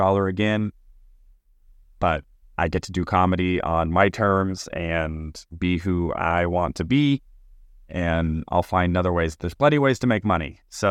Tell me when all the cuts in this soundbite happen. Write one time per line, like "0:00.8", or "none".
none